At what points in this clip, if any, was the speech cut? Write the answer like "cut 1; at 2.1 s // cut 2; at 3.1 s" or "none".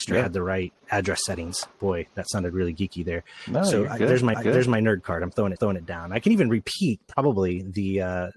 cut 1; at 4.3 s // cut 2; at 5.6 s